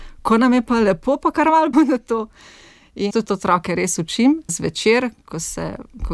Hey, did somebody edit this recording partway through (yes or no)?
yes